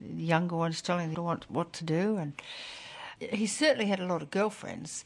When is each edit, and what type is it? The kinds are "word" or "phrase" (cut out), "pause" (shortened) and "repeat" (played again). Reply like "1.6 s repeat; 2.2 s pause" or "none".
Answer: 1.1 s word; 3.2 s word